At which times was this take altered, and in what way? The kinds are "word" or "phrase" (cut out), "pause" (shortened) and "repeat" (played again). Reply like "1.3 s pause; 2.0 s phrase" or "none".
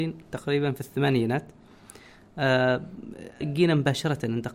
3.4 s word